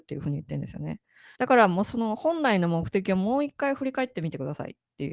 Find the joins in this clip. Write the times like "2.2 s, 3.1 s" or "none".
1.3 s